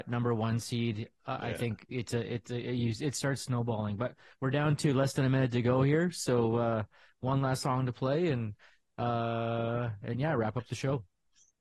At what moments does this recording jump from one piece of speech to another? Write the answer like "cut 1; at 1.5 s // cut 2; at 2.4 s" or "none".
none